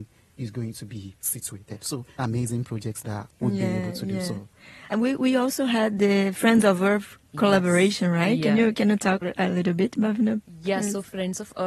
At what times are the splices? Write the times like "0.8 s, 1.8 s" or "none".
2.2 s, 4.9 s, 9.2 s